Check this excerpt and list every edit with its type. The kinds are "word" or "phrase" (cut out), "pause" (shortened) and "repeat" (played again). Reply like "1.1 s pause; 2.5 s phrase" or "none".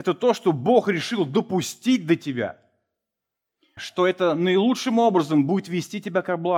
3.8 s word